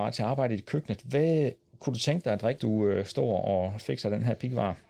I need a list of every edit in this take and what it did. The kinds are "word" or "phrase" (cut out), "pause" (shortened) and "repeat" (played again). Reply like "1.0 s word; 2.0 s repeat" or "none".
2.6 s word